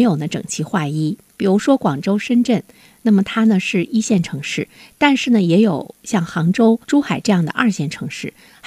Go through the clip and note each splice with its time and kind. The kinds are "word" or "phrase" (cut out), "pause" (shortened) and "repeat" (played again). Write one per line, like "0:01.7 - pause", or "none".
0:06.8 - pause